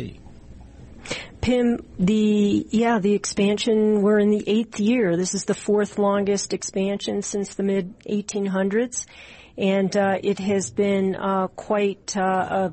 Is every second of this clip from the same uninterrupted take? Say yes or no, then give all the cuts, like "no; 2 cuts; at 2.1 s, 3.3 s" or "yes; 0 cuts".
yes; 0 cuts